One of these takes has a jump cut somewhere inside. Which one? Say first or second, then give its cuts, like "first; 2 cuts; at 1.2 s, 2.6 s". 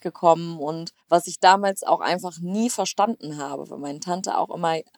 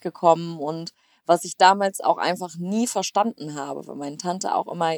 first; 1 cut; at 1.0 s